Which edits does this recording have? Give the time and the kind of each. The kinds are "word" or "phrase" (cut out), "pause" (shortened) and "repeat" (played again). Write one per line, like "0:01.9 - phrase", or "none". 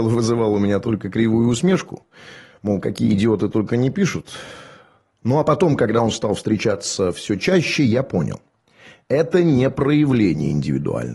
none